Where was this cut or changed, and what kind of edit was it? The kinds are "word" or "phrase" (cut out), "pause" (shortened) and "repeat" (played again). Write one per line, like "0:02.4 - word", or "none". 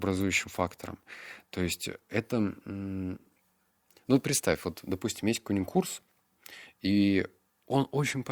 none